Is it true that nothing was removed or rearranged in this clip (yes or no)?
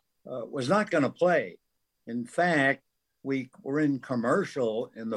yes